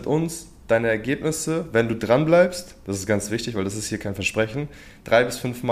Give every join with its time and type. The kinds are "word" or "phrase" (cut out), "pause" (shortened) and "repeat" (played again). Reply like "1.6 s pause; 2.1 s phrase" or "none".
none